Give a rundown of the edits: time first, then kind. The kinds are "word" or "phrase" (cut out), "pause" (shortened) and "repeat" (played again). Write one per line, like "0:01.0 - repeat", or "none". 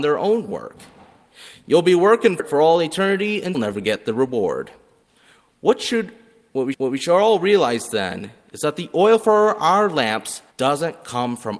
0:02.4 - word
0:03.5 - word
0:05.1 - pause
0:06.7 - repeat
0:10.5 - pause